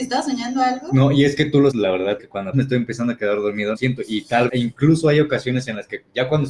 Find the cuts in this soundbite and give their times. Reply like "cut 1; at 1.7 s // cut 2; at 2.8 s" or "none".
cut 1; at 1.7 s // cut 2; at 2.2 s // cut 3; at 2.5 s // cut 4; at 3.7 s // cut 5; at 4.5 s

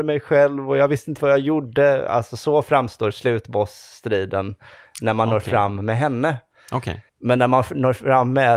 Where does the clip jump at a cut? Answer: cut 1; at 7.1 s

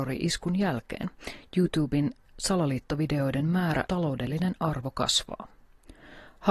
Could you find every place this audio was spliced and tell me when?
cut 1; at 3.9 s

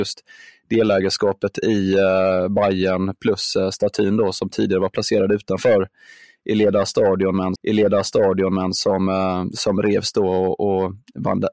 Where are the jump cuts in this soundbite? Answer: cut 1; at 7.6 s

